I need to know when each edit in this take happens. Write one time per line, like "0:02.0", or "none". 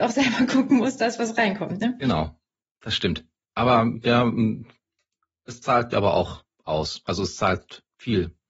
0:05.9